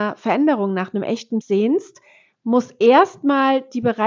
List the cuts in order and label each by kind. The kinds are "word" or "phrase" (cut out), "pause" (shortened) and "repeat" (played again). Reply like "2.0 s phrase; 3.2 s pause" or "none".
1.4 s word